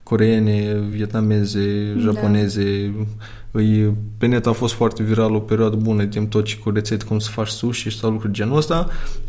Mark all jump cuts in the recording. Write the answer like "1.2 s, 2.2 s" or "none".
none